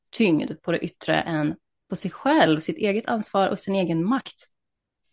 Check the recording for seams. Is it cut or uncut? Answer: uncut